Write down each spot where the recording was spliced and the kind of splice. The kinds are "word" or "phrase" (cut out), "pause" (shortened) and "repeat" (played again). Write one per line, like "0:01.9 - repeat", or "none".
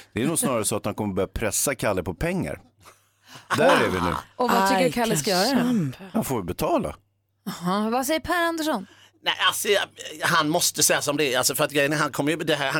none